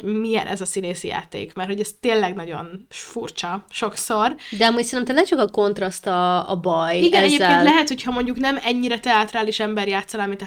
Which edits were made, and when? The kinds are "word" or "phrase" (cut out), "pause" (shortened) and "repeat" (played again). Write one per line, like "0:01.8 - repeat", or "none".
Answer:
0:02.9 - pause